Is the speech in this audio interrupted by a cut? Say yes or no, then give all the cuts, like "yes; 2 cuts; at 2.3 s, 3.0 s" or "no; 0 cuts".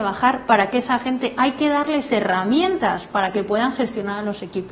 no; 0 cuts